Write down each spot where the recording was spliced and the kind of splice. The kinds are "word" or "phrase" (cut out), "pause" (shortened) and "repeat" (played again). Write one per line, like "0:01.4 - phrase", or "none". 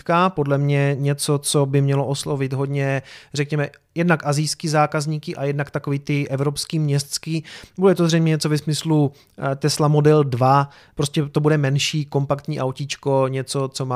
none